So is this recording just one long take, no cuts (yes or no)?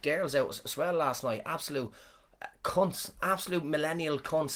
yes